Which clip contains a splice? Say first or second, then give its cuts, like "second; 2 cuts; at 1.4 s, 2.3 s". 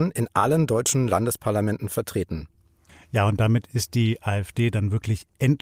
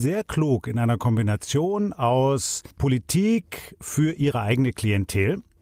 second; 1 cut; at 2.7 s